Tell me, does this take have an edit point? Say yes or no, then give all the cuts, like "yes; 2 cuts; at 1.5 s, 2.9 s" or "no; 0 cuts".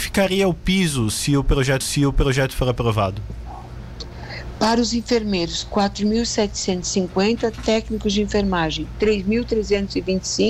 yes; 1 cut; at 1.8 s